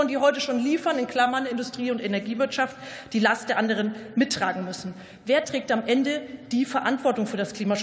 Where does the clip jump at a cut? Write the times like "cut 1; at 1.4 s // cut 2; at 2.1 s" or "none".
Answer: none